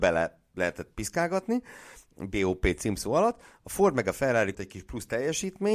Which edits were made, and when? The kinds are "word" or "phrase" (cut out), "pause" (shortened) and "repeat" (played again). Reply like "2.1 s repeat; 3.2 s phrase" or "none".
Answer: 4.5 s word